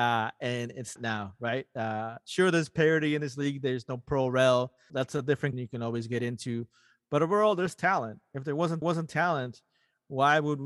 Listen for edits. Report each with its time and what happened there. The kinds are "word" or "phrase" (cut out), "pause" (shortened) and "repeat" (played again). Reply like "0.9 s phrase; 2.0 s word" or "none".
1.0 s word; 4.9 s word; 5.5 s word; 8.8 s repeat